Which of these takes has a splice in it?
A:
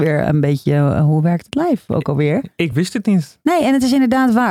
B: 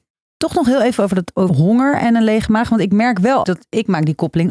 B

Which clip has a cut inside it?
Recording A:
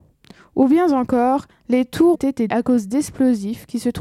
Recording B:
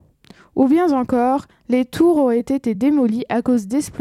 A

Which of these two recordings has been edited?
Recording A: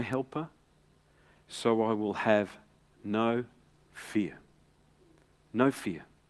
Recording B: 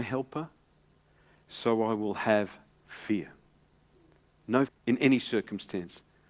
B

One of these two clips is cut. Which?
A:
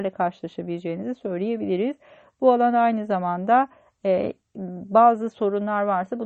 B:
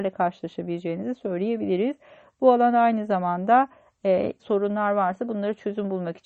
B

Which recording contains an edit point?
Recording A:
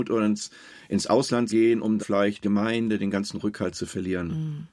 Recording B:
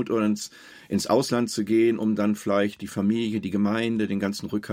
A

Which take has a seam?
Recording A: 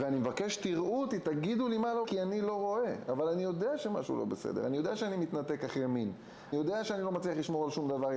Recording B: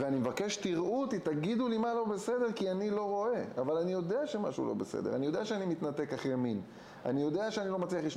A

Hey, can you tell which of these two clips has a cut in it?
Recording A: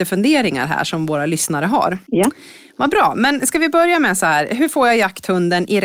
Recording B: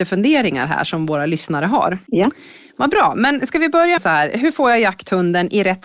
B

